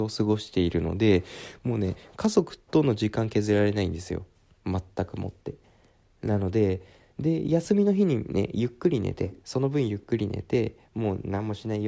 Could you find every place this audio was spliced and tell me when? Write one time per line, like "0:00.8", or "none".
none